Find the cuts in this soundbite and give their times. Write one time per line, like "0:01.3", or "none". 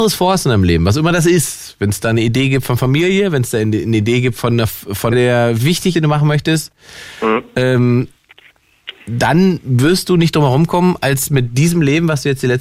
0:05.1
0:05.9